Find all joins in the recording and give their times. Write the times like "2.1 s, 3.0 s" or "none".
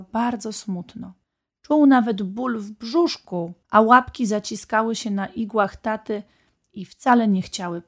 1.2 s, 3.6 s